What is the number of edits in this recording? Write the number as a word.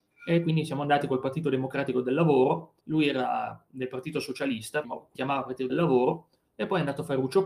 four